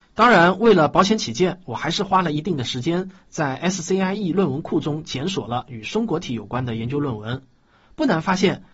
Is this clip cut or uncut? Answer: uncut